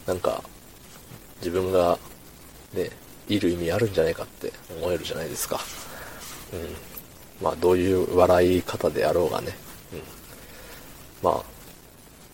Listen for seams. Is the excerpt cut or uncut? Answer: cut